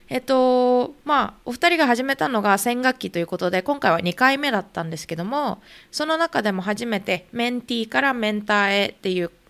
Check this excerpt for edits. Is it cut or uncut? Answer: uncut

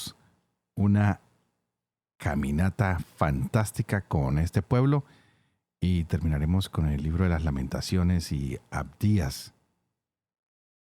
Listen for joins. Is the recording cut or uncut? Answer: uncut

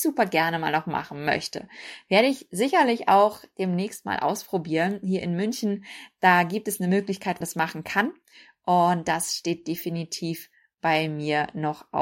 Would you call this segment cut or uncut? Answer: cut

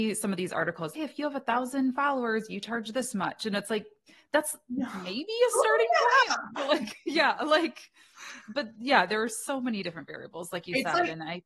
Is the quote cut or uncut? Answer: cut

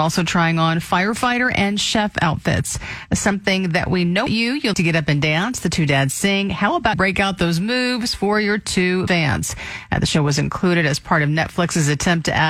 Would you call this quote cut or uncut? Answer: cut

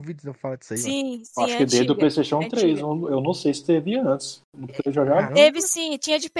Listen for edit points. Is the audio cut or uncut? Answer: cut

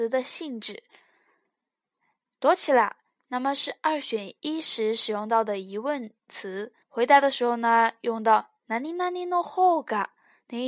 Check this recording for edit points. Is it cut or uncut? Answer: cut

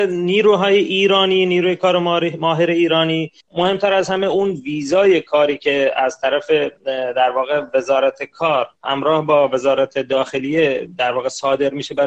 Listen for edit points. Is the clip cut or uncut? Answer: cut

